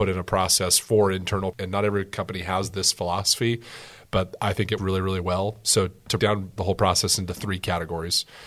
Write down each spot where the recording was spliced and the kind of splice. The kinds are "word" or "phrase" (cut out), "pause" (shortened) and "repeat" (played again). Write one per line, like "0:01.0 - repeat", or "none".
0:01.5 - word
0:04.8 - word
0:06.2 - word
0:06.6 - word